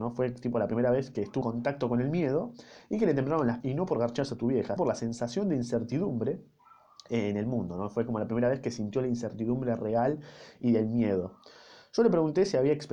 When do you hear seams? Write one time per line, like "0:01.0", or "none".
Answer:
0:01.4
0:03.6
0:04.8